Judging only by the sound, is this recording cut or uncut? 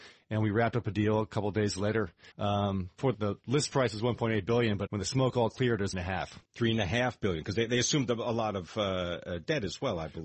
cut